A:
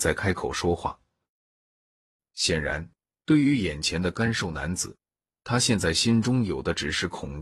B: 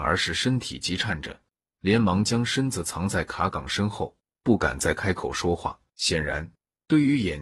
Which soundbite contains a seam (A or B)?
B